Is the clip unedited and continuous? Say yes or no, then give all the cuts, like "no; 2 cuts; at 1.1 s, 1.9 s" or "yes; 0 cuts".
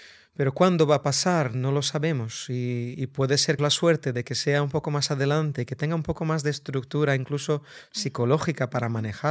no; 1 cut; at 3.6 s